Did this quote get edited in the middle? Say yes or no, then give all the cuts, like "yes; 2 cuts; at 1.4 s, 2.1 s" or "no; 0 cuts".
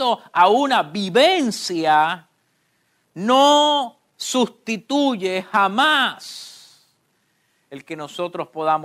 no; 0 cuts